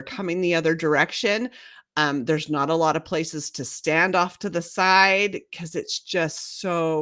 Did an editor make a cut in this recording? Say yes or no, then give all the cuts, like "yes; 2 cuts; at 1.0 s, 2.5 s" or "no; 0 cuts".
no; 0 cuts